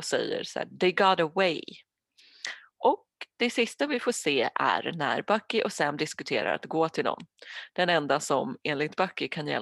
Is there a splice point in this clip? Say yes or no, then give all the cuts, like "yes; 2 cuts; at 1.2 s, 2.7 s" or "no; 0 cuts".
no; 0 cuts